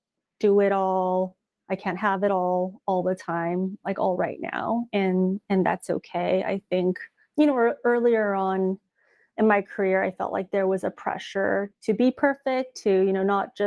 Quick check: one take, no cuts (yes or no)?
yes